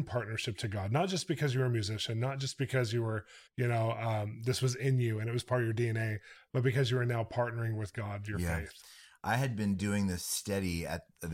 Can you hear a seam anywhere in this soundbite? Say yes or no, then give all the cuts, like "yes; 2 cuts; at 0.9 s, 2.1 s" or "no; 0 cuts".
yes; 1 cut; at 3.5 s